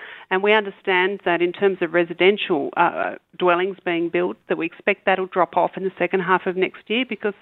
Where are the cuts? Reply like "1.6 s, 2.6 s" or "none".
none